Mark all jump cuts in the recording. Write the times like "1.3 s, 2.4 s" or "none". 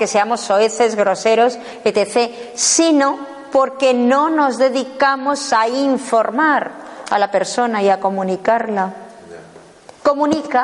none

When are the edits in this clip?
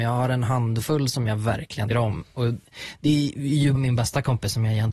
1.9 s, 3.8 s

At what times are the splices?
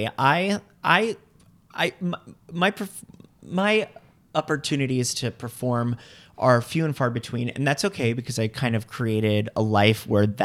none

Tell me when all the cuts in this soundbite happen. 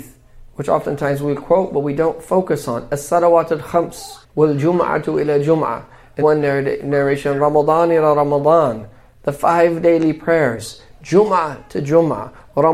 4.2 s, 6.2 s

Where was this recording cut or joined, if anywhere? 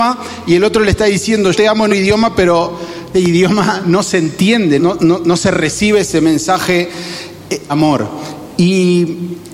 1.5 s, 1.9 s, 3.1 s, 4.8 s, 7.7 s

